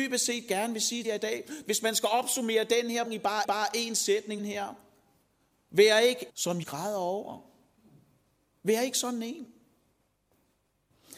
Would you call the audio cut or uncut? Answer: cut